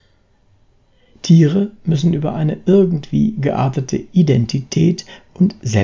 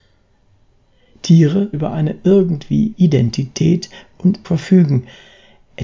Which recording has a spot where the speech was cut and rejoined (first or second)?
second